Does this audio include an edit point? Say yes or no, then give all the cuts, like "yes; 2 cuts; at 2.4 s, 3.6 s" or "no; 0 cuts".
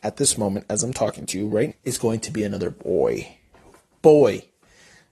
yes; 1 cut; at 1.7 s